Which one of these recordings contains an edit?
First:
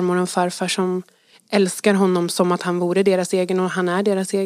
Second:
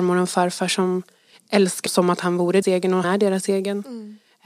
second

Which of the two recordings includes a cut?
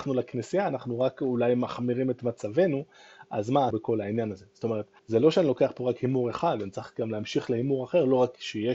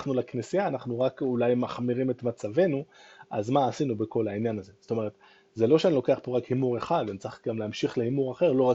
first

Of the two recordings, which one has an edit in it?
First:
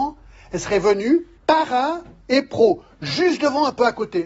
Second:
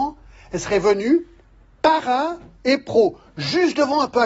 first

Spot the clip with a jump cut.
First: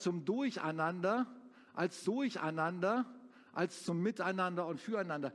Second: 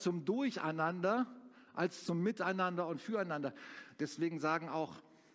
first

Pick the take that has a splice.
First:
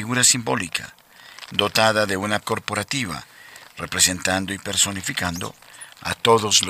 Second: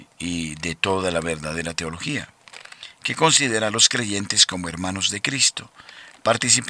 first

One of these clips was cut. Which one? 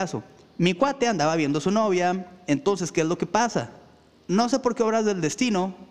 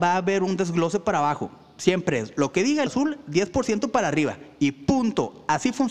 second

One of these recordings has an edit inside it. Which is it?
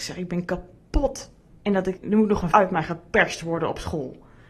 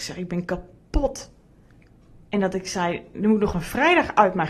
first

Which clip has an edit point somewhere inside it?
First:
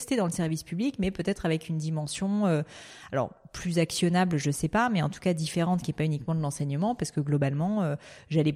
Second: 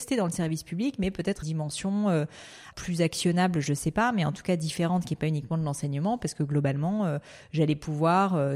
second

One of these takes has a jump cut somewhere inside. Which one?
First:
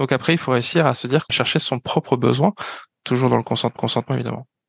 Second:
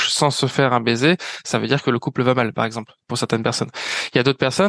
first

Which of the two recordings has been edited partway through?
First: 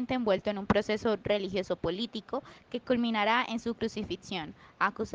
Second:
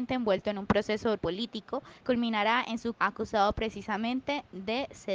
second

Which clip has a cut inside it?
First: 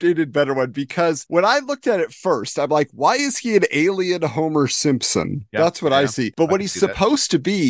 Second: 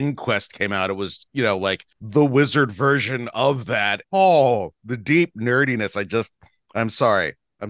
second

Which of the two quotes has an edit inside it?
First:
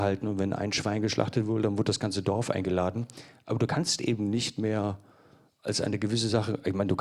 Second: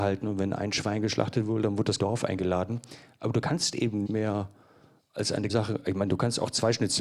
second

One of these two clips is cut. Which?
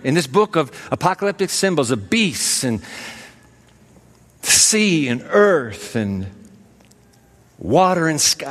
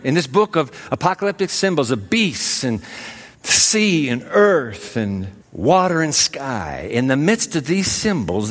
second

